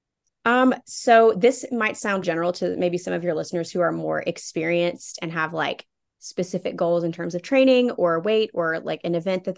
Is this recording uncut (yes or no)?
no